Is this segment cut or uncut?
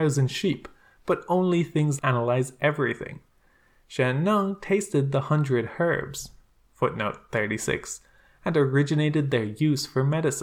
cut